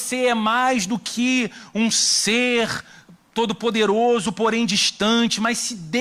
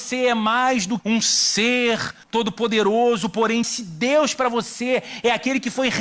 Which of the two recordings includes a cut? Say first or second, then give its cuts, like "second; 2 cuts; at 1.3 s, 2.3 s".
second; 3 cuts; at 1.0 s, 2.2 s, 3.6 s